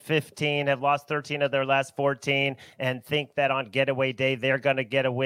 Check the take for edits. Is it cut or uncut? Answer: uncut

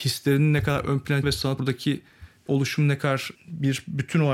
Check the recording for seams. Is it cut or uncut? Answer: cut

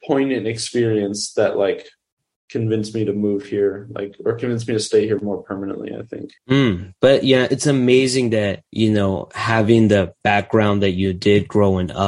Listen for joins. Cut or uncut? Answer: cut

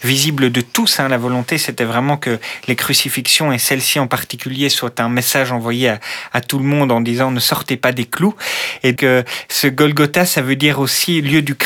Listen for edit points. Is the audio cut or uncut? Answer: cut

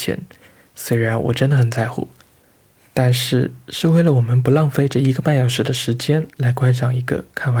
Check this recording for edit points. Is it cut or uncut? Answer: uncut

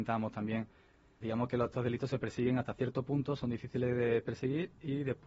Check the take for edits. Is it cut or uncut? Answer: cut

